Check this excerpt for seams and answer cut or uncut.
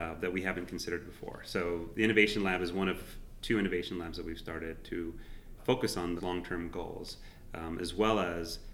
cut